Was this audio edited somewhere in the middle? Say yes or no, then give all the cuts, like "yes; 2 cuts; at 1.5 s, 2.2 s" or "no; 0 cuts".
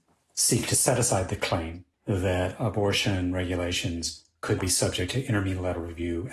yes; 2 cuts; at 1.9 s, 4.6 s